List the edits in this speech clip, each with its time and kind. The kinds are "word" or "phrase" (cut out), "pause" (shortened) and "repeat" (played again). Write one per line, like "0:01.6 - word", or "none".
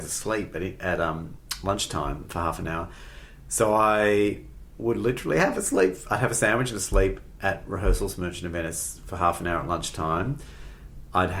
none